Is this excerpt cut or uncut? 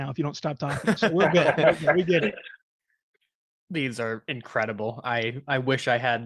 uncut